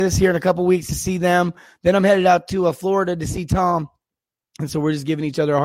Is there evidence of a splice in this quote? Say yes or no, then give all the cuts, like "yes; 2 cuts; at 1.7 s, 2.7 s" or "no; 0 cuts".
no; 0 cuts